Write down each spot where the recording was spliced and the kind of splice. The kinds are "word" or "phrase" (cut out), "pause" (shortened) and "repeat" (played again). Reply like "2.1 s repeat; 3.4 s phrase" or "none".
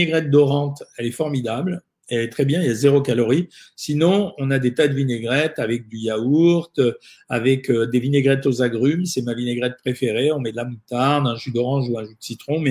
none